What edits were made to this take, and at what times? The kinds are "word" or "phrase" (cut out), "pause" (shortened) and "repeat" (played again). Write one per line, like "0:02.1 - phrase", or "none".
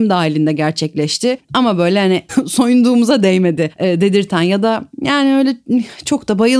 0:02.3 - phrase